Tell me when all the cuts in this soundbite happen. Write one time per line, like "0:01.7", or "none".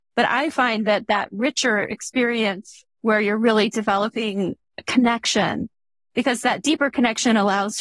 none